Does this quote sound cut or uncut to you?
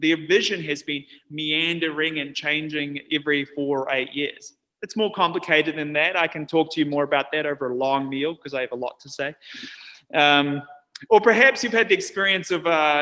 uncut